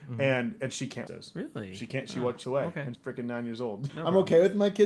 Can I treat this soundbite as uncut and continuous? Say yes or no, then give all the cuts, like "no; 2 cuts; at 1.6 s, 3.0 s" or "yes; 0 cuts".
no; 4 cuts; at 1.1 s, 2.4 s, 2.9 s, 3.9 s